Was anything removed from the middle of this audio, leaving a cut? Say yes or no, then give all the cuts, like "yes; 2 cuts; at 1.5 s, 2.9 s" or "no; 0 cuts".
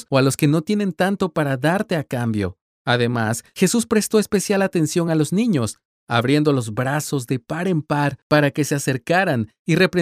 no; 0 cuts